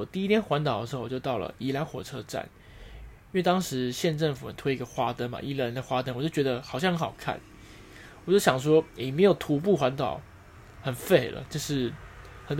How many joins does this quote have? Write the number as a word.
zero